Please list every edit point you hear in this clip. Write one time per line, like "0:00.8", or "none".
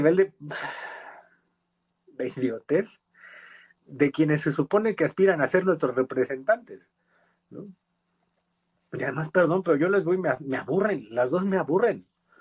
none